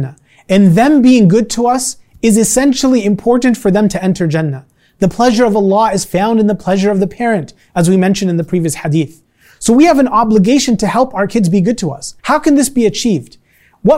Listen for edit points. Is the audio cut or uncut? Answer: cut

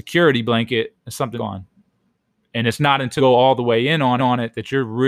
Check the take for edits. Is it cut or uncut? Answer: cut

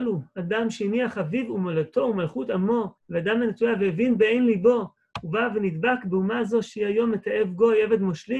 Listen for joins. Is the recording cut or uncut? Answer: cut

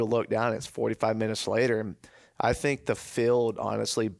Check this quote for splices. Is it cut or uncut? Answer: uncut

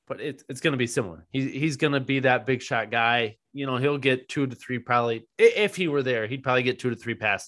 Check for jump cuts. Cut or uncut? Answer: cut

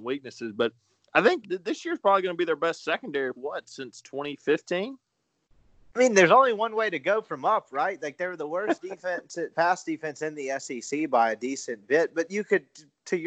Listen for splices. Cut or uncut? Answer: cut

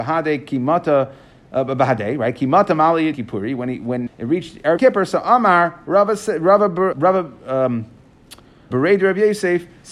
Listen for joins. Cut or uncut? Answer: cut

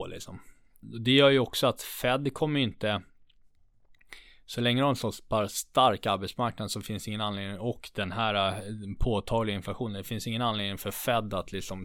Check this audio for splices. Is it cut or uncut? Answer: uncut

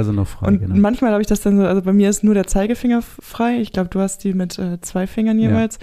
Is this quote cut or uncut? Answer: uncut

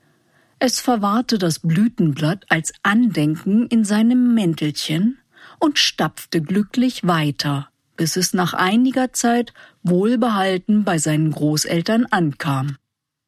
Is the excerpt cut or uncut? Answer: uncut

